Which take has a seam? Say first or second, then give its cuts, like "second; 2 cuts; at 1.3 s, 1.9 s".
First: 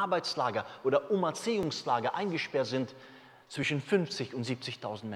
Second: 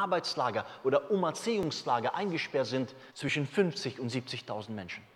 second; 1 cut; at 3.1 s